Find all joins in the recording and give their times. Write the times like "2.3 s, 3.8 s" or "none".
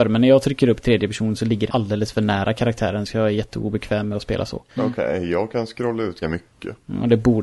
1.7 s, 4.7 s, 6.2 s